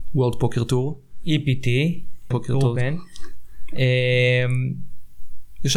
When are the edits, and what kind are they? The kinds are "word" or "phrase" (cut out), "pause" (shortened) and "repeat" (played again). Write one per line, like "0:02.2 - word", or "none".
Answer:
0:02.3 - word